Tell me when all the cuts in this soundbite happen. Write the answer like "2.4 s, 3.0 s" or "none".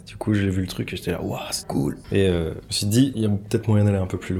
1.6 s